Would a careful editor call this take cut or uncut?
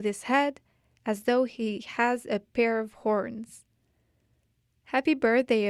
uncut